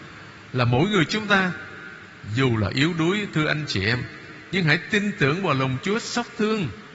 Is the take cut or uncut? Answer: uncut